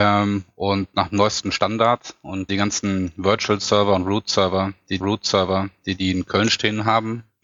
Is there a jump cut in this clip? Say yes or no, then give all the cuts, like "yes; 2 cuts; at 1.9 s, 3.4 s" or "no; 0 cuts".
yes; 2 cuts; at 2.5 s, 5.0 s